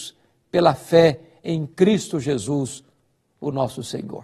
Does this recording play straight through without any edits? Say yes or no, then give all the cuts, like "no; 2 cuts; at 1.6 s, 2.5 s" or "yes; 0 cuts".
yes; 0 cuts